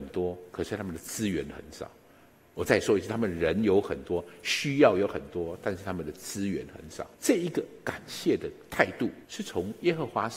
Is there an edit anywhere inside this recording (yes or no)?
yes